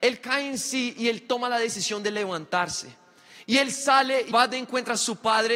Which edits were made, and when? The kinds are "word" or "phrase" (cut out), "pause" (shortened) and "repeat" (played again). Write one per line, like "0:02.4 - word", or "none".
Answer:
0:04.3 - word